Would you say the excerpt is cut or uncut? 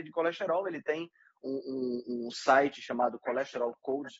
uncut